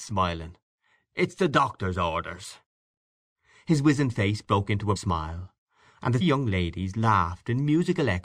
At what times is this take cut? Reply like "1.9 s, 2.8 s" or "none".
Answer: 5.0 s, 6.2 s